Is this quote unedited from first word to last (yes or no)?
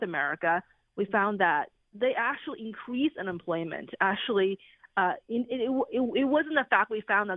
yes